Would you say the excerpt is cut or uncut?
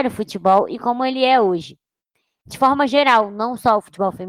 uncut